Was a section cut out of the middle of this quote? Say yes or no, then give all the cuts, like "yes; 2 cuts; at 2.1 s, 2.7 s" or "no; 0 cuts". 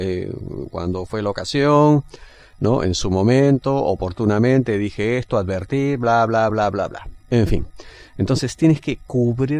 no; 0 cuts